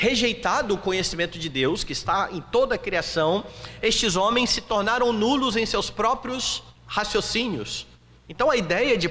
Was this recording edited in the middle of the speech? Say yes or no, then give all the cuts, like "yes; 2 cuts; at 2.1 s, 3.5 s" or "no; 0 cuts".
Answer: yes; 1 cut; at 6.7 s